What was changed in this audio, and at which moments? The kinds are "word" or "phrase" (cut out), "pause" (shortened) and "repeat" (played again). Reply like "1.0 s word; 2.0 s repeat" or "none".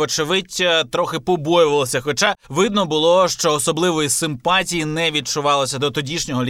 2.4 s pause